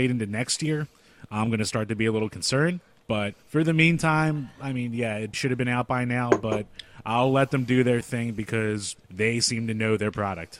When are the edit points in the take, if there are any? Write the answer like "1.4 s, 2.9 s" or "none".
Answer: 3.4 s, 5.3 s, 9.0 s